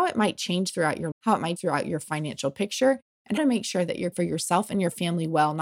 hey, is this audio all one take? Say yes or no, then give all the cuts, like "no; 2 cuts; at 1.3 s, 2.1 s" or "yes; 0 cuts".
no; 4 cuts; at 1.1 s, 1.6 s, 3.4 s, 4.1 s